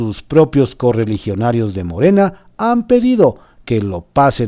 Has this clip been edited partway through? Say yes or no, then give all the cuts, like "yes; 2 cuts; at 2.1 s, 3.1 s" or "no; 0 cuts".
no; 0 cuts